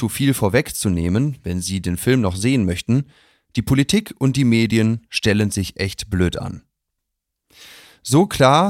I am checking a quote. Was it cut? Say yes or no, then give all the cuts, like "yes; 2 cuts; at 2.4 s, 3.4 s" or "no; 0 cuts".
no; 0 cuts